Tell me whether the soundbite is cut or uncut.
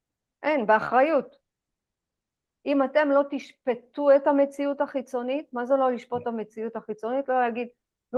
uncut